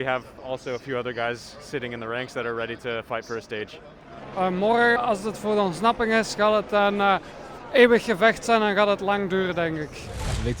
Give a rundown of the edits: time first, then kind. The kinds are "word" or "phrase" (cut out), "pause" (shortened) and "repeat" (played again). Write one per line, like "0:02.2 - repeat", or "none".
0:05.0 - word